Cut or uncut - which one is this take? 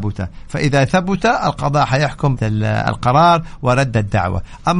cut